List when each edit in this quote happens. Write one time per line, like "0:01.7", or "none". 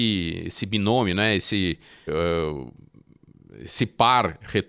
0:02.1